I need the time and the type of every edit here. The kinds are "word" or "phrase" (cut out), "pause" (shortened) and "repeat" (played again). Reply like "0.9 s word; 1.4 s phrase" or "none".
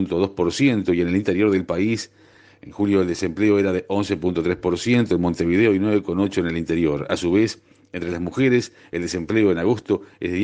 none